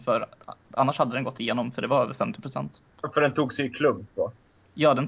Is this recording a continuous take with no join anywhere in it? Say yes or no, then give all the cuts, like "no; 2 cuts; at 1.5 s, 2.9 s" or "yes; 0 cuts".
yes; 0 cuts